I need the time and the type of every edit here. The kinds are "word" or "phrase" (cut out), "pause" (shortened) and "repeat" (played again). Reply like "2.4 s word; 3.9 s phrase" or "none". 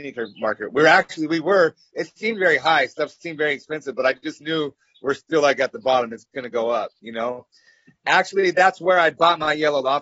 none